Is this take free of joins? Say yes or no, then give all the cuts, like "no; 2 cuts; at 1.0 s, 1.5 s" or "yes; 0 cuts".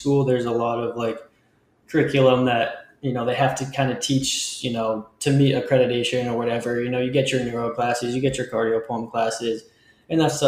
yes; 0 cuts